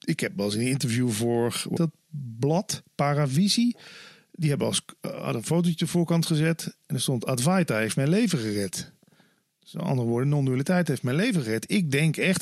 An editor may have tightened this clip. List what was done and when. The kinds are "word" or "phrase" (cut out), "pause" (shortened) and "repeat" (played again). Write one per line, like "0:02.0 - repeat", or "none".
0:01.8 - word